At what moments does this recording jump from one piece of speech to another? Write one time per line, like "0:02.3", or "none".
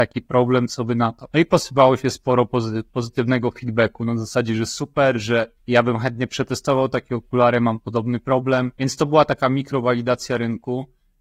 0:01.3
0:02.9
0:05.6
0:08.8

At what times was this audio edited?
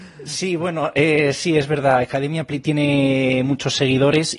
none

